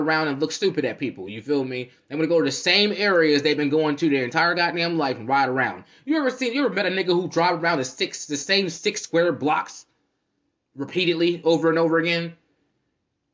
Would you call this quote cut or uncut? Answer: uncut